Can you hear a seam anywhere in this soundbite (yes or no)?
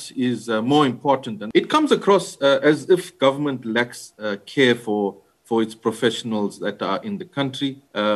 no